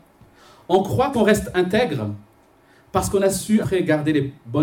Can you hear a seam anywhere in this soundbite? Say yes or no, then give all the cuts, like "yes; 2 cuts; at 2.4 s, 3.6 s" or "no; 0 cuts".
yes; 2 cuts; at 1.1 s, 3.6 s